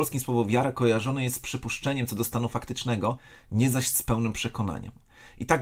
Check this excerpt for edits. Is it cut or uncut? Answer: uncut